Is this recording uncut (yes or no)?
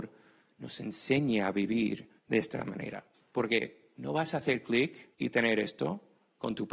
no